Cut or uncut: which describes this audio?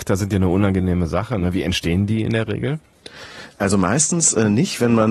uncut